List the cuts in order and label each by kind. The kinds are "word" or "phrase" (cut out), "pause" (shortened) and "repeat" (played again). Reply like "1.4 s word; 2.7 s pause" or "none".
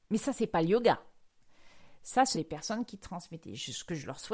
2.3 s word